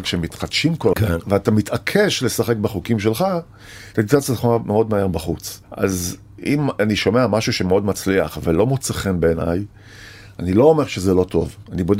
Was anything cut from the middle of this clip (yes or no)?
yes